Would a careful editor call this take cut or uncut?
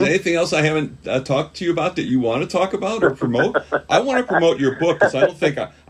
uncut